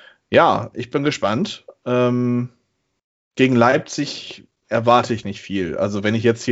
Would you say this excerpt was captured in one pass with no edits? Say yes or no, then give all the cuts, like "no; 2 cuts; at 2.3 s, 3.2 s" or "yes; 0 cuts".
no; 1 cut; at 5.2 s